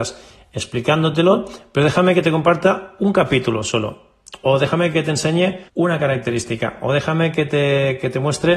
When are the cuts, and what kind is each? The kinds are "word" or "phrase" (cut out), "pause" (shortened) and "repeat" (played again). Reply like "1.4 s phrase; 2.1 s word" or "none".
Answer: 5.7 s pause